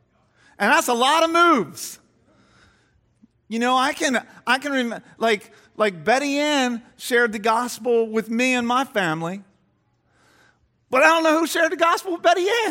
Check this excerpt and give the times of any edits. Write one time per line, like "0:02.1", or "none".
none